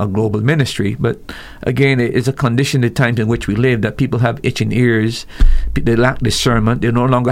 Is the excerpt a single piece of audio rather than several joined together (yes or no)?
yes